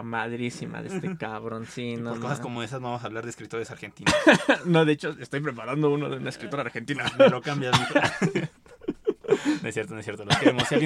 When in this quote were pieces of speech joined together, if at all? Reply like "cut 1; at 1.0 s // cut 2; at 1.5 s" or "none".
none